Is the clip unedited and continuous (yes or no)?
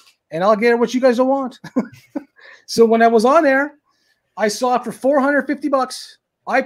yes